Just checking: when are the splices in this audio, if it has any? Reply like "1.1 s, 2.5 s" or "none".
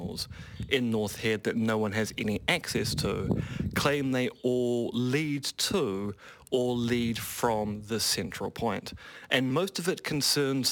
none